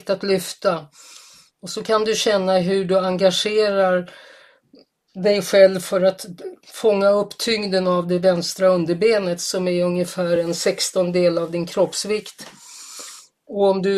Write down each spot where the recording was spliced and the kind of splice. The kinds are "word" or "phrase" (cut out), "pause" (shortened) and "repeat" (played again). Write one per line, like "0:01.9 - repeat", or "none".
none